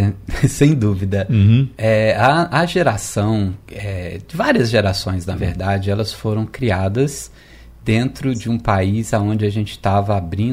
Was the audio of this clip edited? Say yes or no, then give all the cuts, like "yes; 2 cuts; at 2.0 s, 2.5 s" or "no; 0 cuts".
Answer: no; 0 cuts